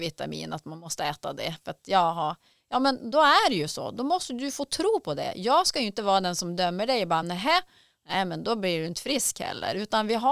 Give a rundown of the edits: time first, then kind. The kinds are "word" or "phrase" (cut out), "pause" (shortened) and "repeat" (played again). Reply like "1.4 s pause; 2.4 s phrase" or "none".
none